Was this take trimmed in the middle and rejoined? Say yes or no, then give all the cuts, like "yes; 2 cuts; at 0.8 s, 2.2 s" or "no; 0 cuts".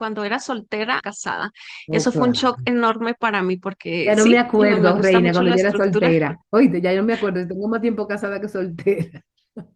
yes; 2 cuts; at 1.0 s, 6.4 s